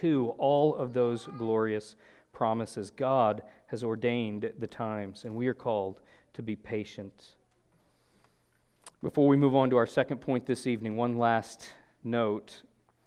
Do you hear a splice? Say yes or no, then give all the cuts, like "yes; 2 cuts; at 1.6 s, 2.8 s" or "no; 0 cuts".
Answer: no; 0 cuts